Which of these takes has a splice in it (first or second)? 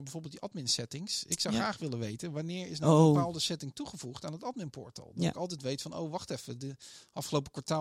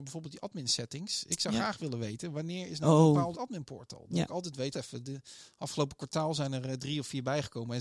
second